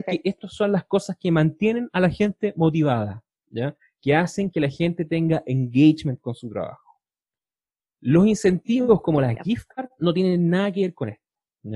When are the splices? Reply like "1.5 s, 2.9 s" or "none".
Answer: none